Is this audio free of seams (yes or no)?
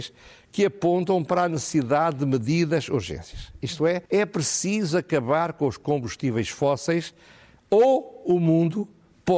no